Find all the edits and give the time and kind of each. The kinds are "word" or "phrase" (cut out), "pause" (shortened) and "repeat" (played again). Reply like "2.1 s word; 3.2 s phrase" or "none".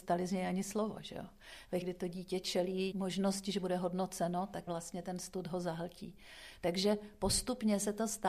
1.8 s word; 2.9 s word; 4.7 s word